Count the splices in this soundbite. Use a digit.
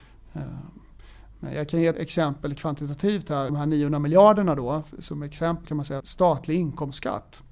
4